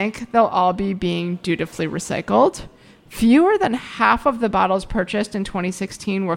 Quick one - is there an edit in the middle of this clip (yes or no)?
no